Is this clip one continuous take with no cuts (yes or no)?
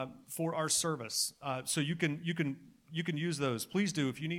yes